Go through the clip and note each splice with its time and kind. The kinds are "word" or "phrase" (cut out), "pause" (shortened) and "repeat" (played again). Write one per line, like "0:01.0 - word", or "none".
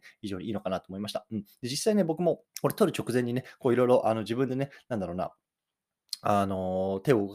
0:02.5 - pause